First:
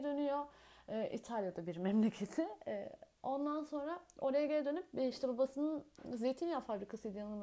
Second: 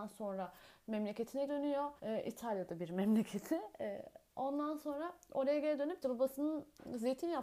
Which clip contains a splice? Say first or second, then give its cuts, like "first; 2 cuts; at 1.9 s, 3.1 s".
second; 3 cuts; at 1.5 s, 2.0 s, 6.0 s